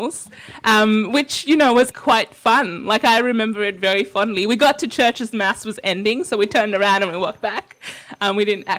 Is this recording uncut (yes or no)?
no